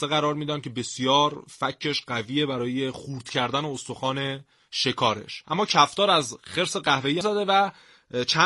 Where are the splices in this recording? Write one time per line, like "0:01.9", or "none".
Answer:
0:07.2